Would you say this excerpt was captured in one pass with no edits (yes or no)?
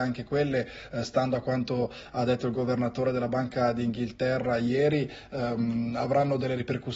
yes